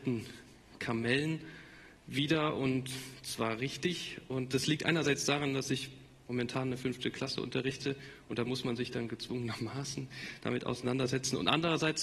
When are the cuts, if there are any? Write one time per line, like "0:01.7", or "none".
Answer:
none